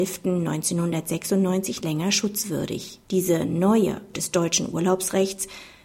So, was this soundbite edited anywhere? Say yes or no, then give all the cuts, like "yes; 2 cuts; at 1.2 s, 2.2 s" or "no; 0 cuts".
yes; 3 cuts; at 1.8 s, 3.0 s, 4.1 s